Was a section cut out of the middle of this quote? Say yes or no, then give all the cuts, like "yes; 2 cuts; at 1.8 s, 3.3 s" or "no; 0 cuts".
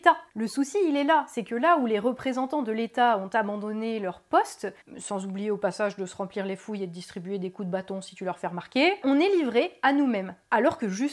yes; 1 cut; at 9.0 s